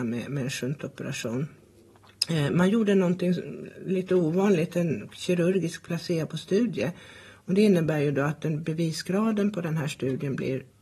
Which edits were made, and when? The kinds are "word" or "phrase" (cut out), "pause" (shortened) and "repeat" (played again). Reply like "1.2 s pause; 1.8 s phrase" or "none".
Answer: none